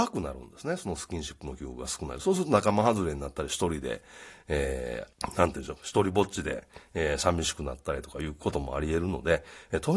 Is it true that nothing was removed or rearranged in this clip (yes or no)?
no